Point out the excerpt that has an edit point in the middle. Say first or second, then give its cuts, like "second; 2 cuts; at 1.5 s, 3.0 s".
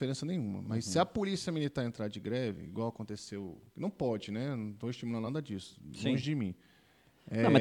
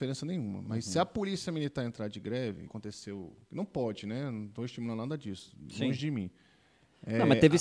second; 1 cut; at 2.7 s